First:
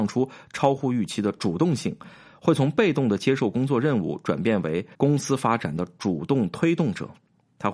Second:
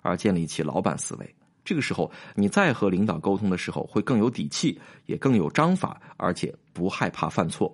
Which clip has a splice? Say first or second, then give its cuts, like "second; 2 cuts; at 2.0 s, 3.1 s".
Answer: first; 1 cut; at 4.9 s